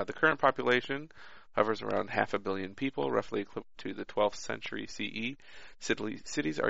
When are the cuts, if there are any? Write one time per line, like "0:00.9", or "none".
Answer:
0:03.7